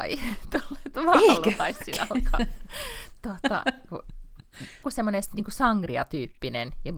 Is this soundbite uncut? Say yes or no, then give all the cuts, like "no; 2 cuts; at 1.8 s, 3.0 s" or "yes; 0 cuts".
no; 2 cuts; at 3.9 s, 4.8 s